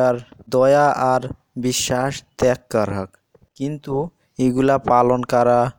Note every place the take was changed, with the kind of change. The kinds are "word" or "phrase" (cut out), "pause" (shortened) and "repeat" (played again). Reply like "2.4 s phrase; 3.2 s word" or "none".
none